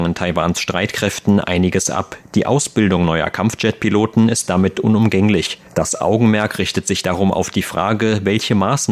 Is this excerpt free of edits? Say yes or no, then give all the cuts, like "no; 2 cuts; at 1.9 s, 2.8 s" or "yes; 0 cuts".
no; 1 cut; at 5.7 s